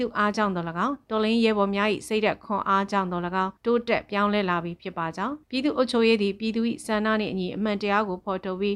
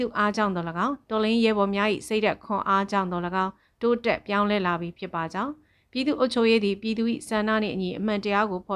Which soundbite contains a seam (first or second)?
first